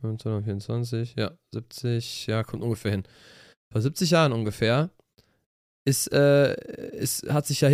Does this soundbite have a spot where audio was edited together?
no; 0 cuts

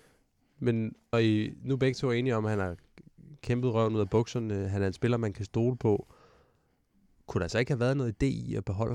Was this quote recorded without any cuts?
no; 1 cut; at 1.1 s

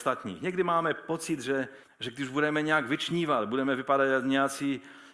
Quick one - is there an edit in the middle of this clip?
yes; 1 cut; at 1.8 s

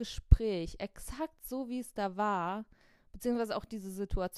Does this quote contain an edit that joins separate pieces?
no; 0 cuts

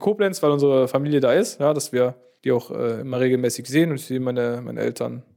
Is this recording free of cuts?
yes; 0 cuts

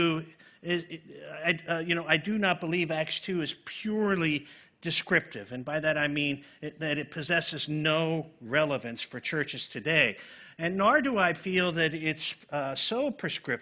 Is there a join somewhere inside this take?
no; 0 cuts

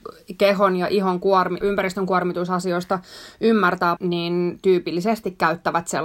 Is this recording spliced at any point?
yes; 2 cuts; at 1.6 s, 4.0 s

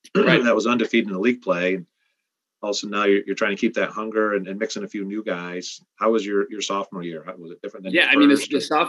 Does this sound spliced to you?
no; 0 cuts

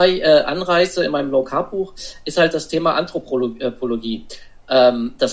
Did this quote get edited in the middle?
no; 0 cuts

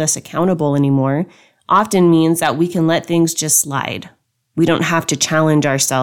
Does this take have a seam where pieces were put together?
no; 0 cuts

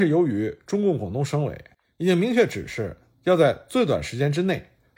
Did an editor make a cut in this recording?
no; 0 cuts

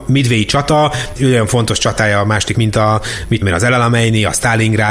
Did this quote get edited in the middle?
yes; 3 cuts; at 1.2 s, 2.5 s, 3.4 s

